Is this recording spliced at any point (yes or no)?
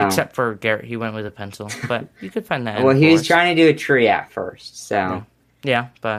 no